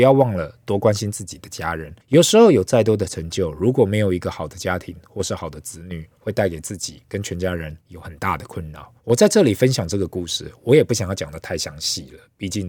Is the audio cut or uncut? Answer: cut